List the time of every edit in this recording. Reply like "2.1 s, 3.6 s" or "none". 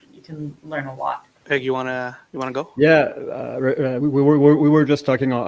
1.3 s, 4.0 s